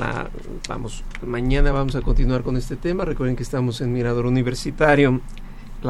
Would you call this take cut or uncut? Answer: uncut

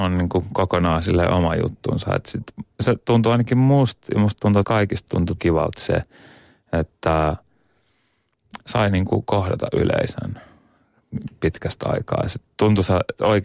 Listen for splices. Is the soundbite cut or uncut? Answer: cut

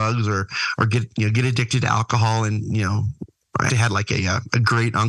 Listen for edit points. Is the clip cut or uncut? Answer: cut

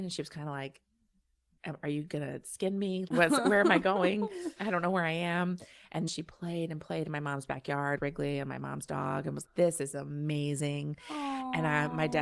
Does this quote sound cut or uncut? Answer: cut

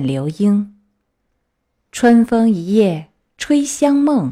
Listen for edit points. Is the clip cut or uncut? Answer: uncut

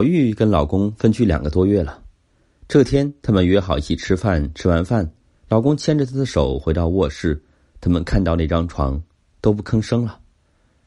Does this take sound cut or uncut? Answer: uncut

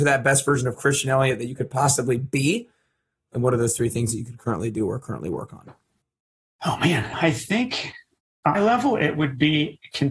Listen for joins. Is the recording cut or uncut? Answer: cut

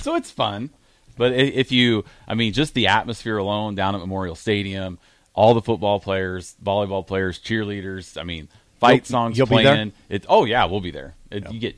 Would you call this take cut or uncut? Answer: uncut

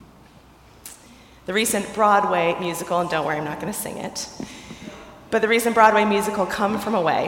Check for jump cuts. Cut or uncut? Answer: uncut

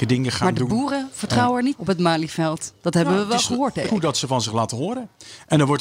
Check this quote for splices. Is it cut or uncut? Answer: cut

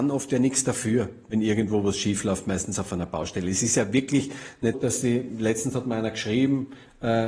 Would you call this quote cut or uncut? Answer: cut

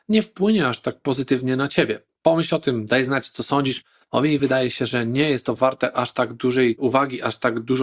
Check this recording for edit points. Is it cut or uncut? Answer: uncut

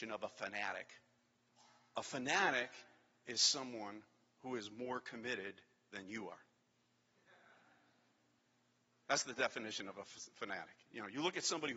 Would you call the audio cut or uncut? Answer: cut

